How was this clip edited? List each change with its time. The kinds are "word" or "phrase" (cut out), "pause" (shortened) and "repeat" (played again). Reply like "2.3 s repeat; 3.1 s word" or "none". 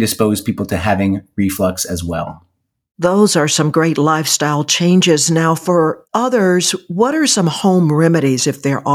none